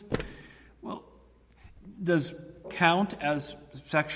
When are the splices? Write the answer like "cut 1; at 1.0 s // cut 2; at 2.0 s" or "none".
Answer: cut 1; at 2.6 s